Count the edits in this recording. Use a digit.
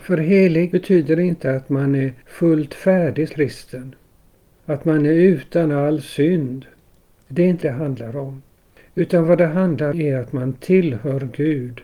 4